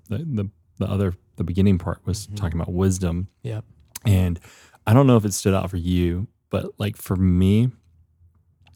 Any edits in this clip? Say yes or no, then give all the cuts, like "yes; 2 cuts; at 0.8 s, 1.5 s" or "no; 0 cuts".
no; 0 cuts